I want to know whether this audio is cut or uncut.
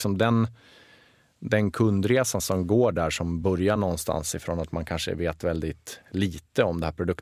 uncut